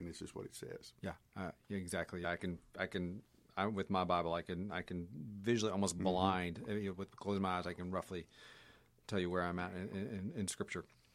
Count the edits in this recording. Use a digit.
1